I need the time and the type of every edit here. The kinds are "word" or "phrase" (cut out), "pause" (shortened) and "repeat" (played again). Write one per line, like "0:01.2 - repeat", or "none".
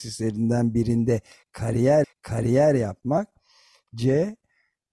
0:02.0 - repeat